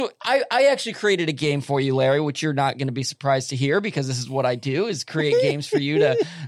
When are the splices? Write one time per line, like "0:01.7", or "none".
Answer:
none